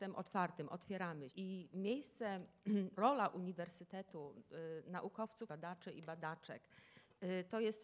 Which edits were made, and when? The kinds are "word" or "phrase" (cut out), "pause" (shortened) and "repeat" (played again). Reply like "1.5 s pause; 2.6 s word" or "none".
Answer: 1.3 s word; 3.0 s word; 5.5 s word

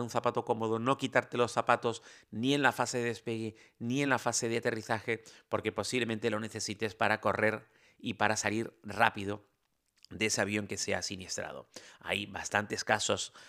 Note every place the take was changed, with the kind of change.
none

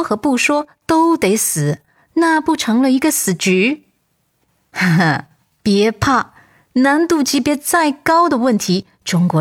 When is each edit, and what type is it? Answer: none

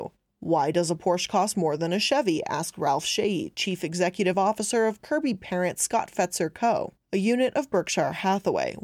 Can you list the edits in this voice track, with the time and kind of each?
none

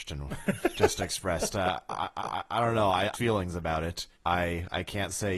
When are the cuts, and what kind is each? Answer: 2.2 s repeat; 3.1 s phrase; 4.1 s pause

